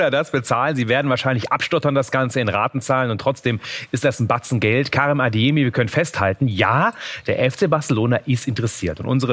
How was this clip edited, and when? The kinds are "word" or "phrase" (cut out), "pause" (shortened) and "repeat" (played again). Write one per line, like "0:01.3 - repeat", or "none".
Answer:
none